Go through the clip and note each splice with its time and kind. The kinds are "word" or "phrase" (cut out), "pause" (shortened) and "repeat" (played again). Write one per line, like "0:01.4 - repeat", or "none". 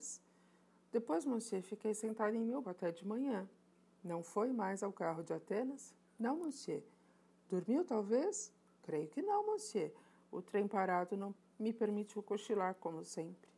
0:02.6 - word